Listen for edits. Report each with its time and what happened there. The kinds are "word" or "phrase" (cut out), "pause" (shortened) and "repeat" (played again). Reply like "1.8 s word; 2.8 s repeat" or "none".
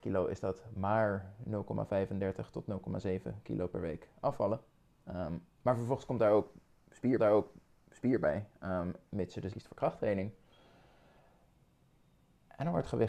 5.5 s pause; 7.2 s repeat; 9.5 s word